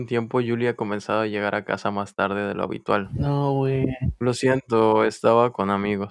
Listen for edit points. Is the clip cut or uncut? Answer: uncut